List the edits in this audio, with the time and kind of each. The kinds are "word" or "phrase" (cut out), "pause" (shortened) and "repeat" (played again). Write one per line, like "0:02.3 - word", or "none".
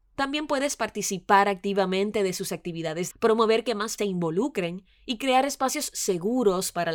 0:03.1 - word
0:04.0 - phrase